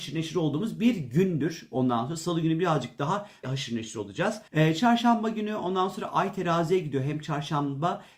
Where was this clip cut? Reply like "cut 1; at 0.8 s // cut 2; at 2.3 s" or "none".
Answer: cut 1; at 3.4 s // cut 2; at 4.5 s